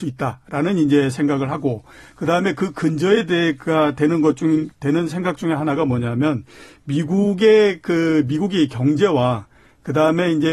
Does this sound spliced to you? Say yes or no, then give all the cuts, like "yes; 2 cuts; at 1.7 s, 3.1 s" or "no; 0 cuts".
no; 0 cuts